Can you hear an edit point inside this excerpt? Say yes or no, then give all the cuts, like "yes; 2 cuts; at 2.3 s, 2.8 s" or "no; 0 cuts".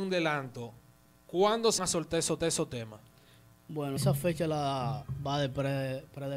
yes; 3 cuts; at 1.8 s, 2.4 s, 4.0 s